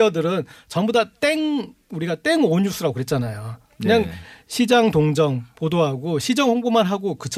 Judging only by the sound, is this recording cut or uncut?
uncut